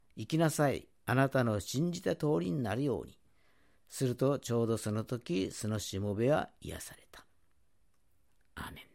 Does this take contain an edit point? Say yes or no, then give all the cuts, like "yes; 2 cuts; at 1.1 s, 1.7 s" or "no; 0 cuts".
no; 0 cuts